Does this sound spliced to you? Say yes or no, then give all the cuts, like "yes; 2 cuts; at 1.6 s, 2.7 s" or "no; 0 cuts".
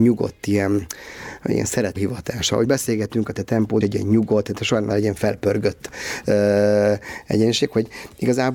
yes; 4 cuts; at 2.0 s, 2.6 s, 3.8 s, 4.9 s